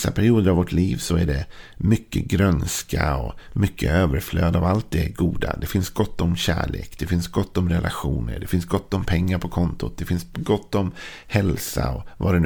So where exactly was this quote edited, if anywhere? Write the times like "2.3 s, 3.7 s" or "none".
none